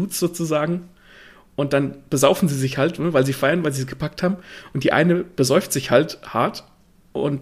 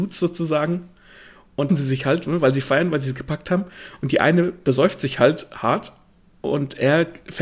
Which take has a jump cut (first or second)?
second